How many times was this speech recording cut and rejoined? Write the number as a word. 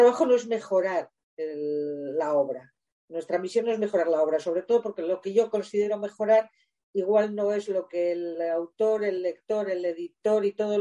zero